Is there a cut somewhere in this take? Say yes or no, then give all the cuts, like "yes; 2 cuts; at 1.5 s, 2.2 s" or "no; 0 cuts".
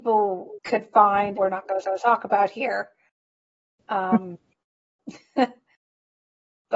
yes; 2 cuts; at 1.3 s, 1.8 s